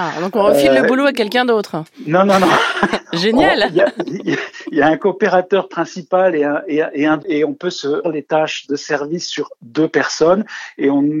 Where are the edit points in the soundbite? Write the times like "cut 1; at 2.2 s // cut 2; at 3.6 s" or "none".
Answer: cut 1; at 1.9 s // cut 2; at 7.2 s // cut 3; at 8.0 s